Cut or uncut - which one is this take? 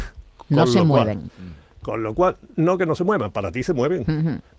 uncut